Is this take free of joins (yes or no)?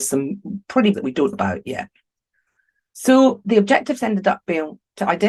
no